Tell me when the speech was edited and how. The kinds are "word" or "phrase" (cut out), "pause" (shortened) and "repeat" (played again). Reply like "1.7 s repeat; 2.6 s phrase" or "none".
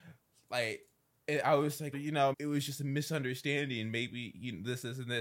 1.9 s word; 2.3 s word

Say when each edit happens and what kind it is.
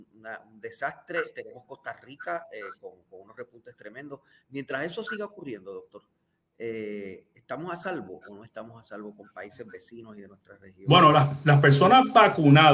none

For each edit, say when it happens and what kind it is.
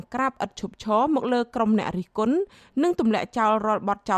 none

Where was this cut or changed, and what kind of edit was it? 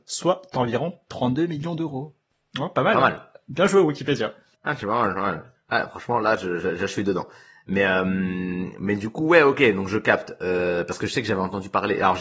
none

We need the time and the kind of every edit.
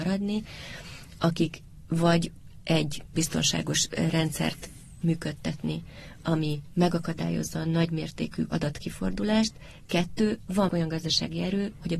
3.2 s word; 5.0 s word; 10.7 s word

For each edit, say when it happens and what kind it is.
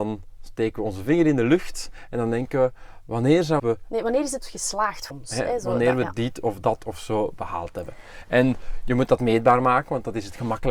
3.6 s phrase; 5.1 s word

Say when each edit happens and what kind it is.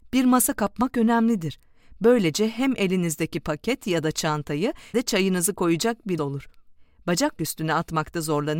4.9 s word; 6.2 s word; 7.4 s word

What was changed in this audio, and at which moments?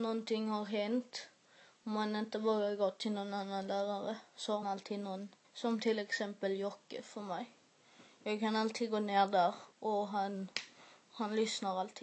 4.6 s word; 5.4 s pause; 9.7 s pause

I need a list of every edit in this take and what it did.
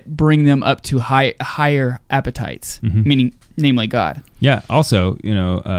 none

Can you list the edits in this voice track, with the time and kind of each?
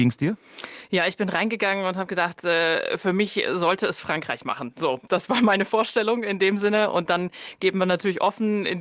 none

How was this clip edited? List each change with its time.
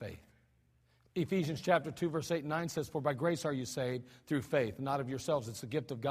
none

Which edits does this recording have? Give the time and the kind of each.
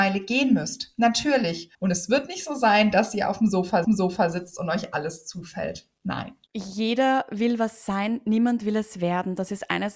1.7 s pause; 3.8 s repeat; 6.5 s pause

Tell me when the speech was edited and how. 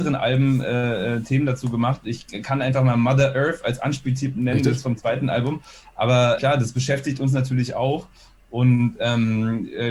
6.4 s word

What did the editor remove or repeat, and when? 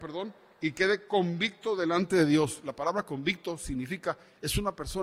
none

